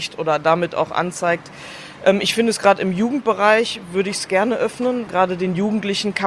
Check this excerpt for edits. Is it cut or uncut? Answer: cut